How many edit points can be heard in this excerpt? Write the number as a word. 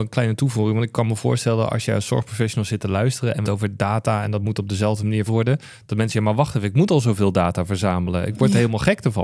two